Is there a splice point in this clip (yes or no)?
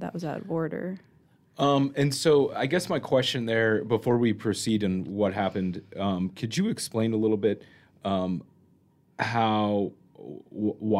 no